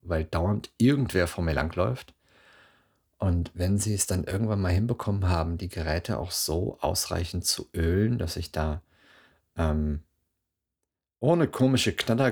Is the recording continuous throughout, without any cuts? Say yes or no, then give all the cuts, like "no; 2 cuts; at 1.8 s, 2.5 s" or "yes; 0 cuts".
yes; 0 cuts